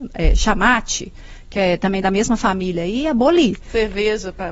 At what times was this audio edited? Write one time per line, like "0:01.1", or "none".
none